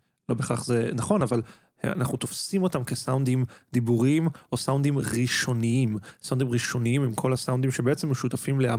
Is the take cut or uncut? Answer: uncut